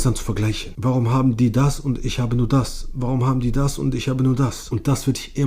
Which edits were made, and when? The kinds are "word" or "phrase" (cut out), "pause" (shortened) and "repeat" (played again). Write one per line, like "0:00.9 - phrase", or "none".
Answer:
none